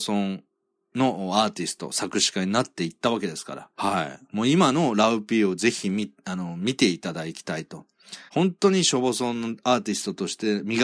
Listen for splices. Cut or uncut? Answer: cut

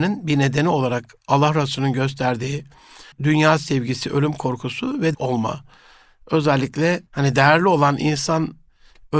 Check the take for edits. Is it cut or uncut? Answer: cut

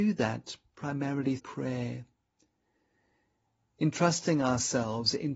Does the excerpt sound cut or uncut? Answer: cut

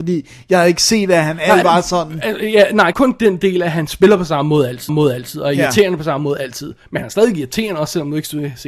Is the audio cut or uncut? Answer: cut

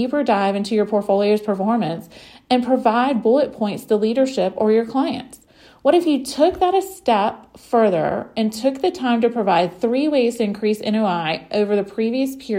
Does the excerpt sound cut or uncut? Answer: uncut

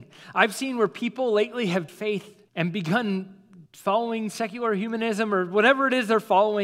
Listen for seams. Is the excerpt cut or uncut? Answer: cut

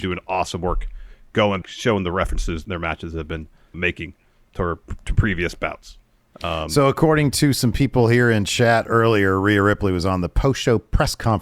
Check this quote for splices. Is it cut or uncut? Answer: cut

